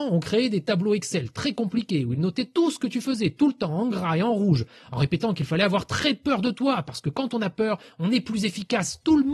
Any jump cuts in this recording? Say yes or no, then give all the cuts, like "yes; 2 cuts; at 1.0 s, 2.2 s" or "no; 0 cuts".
no; 0 cuts